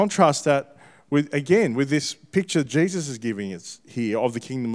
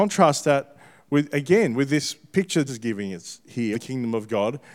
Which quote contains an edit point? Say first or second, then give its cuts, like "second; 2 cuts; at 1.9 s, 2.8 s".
second; 2 cuts; at 2.7 s, 3.7 s